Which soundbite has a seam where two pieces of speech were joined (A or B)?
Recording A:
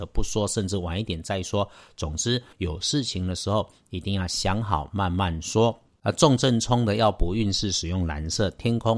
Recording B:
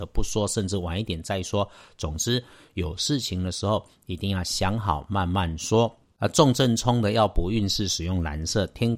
A